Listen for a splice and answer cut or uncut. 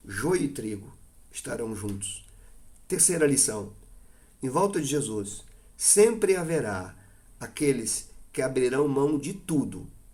uncut